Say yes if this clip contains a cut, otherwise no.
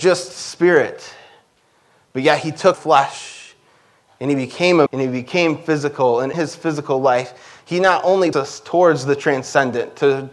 yes